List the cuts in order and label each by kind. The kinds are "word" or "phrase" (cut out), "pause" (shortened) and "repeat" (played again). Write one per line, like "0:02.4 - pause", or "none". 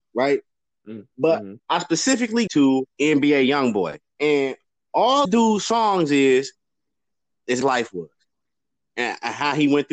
0:01.6 - pause
0:02.5 - word
0:02.9 - pause
0:04.1 - pause
0:05.2 - word
0:07.6 - phrase

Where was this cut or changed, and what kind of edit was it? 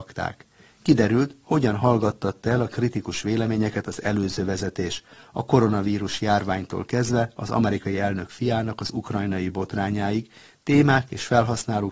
none

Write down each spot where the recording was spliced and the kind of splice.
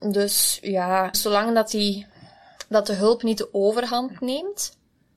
0:01.1 - phrase

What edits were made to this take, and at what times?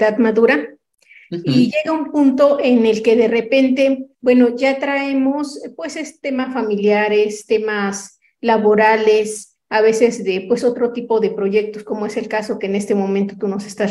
0:04.1 - pause

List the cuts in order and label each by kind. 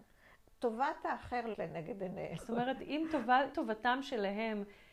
0:01.5 - word
0:02.4 - word
0:03.5 - word

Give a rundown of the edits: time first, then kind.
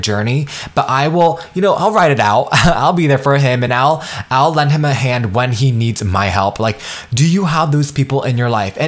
none

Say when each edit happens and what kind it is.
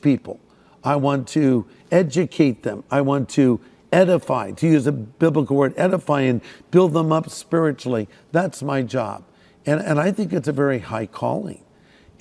none

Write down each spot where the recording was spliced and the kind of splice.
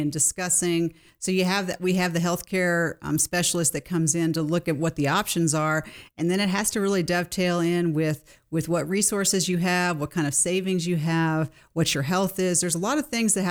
none

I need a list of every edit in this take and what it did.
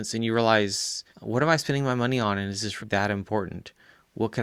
0:01.1 - pause
0:02.8 - word

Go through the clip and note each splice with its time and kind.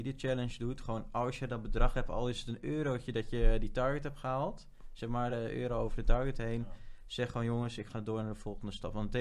none

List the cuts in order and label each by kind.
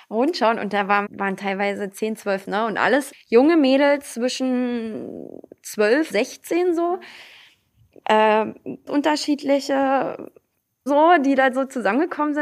0:01.1 - word
0:02.4 - word
0:03.1 - word
0:06.1 - word
0:08.9 - word
0:10.9 - word

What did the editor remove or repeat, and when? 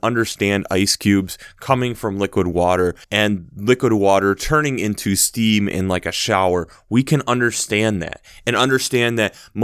0:03.0 - pause

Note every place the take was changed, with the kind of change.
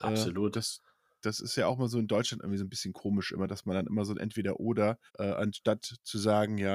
0:05.1 - pause

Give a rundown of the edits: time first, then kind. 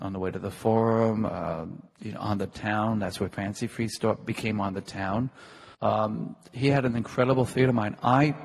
0:01.9 - pause
0:05.7 - pause

